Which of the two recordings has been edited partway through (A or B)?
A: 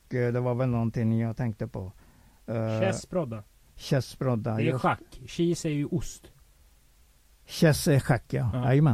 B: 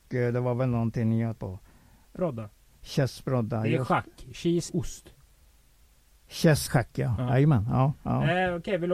B